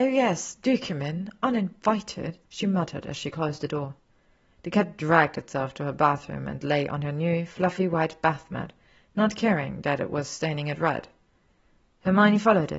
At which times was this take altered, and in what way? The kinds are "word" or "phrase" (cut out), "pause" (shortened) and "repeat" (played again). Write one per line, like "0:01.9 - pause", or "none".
0:02.5 - pause